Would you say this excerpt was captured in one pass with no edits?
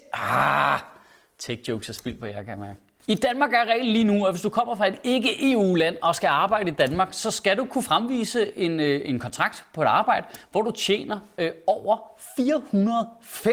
yes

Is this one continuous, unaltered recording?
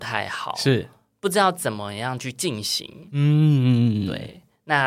yes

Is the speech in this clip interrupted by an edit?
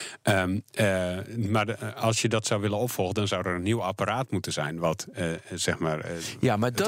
no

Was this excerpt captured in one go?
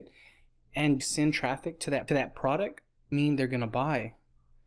no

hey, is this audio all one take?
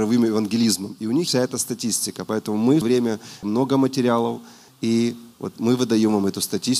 no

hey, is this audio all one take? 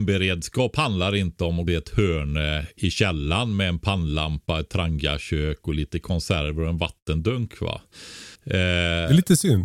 no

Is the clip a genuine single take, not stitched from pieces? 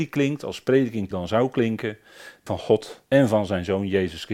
no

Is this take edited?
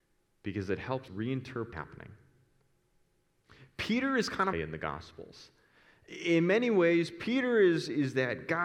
yes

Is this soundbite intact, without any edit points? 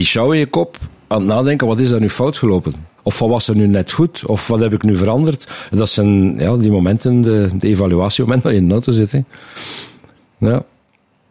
no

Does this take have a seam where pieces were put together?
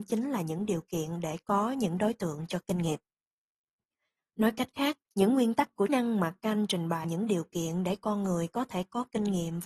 yes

